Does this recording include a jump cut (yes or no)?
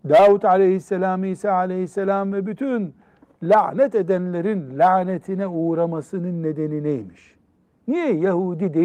no